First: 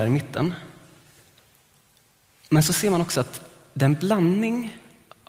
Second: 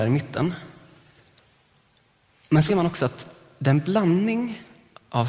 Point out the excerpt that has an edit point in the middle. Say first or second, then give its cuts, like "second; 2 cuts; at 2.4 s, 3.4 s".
second; 1 cut; at 2.7 s